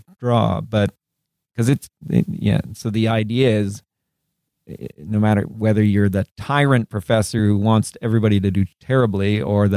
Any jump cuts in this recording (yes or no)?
no